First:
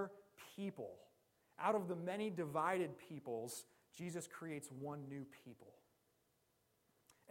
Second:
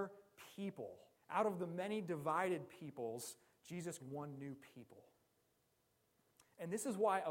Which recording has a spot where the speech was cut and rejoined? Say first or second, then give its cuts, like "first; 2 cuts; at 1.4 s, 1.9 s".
second; 2 cuts; at 1.1 s, 4.0 s